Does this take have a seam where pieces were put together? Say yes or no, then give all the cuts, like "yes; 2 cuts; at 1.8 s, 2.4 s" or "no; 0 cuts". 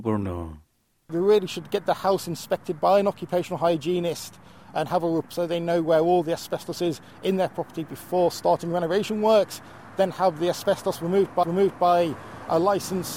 yes; 2 cuts; at 5.2 s, 11.4 s